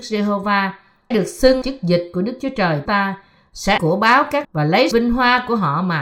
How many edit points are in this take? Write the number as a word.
six